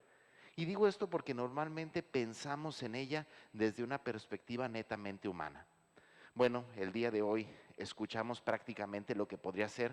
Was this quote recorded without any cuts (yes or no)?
yes